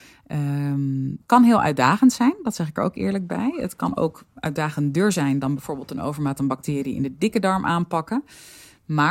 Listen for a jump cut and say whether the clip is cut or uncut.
uncut